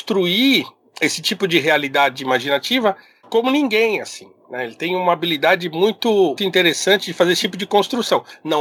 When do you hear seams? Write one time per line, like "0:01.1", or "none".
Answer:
0:06.4